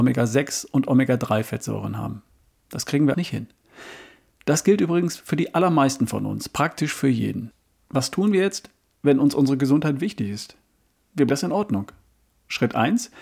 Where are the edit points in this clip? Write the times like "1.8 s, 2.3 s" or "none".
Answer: 3.1 s, 11.3 s